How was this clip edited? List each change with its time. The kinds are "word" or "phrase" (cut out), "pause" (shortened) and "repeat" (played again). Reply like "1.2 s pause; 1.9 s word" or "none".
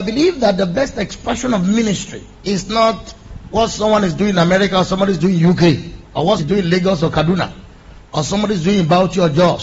2.3 s pause; 6.0 s pause; 6.4 s word